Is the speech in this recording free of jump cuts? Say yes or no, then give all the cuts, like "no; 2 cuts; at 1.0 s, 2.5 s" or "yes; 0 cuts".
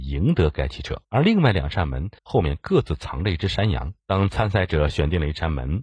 no; 3 cuts; at 1.0 s, 2.2 s, 4.0 s